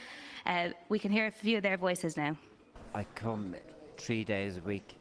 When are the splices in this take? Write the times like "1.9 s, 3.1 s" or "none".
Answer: none